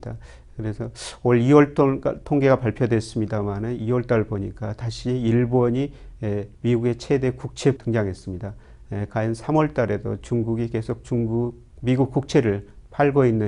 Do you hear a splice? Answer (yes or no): yes